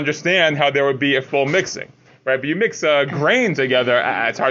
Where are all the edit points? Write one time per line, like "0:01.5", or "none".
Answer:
none